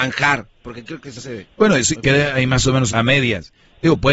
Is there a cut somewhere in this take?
yes; 3 cuts; at 1.2 s, 2.0 s, 2.9 s

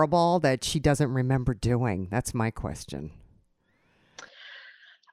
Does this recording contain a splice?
no; 0 cuts

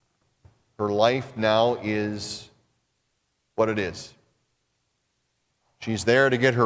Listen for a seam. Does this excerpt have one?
no; 0 cuts

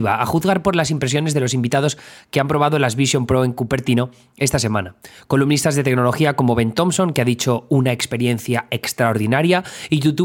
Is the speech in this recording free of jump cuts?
yes; 0 cuts

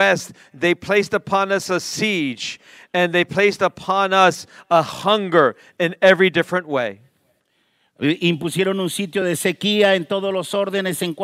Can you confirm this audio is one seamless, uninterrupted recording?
yes; 0 cuts

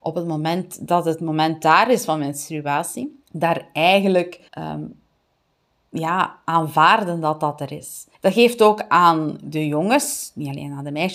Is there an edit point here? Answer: yes; 3 cuts; at 3.2 s, 4.5 s, 8.1 s

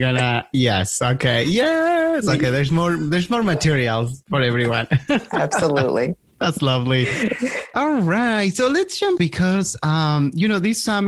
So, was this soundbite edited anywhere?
yes; 1 cut; at 9.2 s

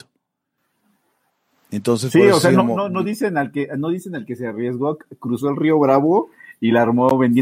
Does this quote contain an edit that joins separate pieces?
no; 0 cuts

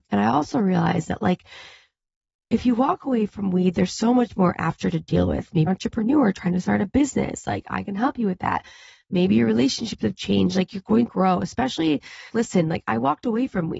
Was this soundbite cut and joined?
yes; 3 cuts; at 5.7 s, 11.1 s, 12.3 s

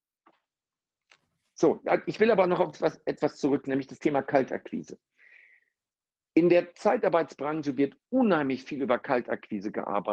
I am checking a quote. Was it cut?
no; 0 cuts

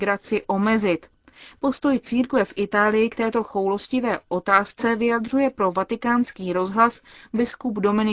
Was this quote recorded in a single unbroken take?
yes; 0 cuts

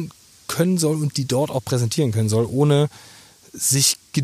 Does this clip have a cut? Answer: no; 0 cuts

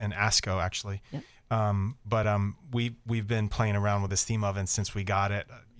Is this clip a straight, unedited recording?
yes; 0 cuts

